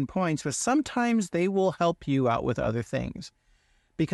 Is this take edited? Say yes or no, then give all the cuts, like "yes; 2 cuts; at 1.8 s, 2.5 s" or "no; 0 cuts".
no; 0 cuts